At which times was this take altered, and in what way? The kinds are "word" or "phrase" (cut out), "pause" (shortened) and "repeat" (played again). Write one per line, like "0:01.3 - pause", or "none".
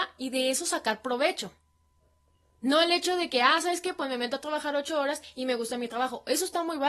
0:02.3 - pause